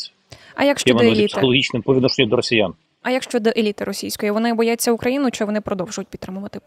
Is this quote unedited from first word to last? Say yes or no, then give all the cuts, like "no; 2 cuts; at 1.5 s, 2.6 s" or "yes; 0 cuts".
no; 1 cut; at 2.9 s